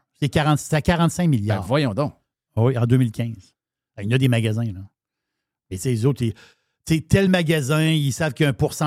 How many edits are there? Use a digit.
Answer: 0